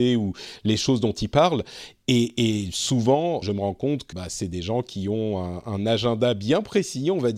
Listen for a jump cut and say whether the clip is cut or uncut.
cut